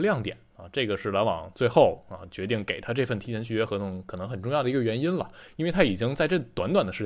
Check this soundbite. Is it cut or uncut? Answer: uncut